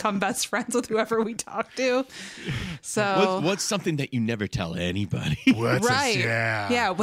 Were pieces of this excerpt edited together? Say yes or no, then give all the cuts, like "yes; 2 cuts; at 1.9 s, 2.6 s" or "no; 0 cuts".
no; 0 cuts